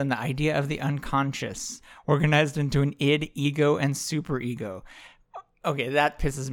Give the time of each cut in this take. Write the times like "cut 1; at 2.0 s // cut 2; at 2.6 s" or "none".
none